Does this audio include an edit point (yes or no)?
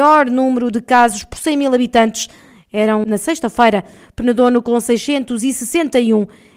no